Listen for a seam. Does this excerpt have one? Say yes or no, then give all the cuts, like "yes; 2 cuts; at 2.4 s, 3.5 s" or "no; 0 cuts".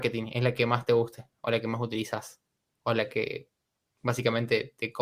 no; 0 cuts